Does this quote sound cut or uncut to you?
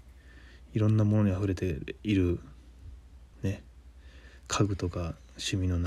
cut